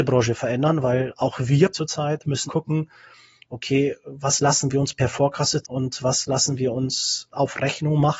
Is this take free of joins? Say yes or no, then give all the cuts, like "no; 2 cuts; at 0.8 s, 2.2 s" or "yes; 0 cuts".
no; 3 cuts; at 1.7 s, 2.5 s, 5.6 s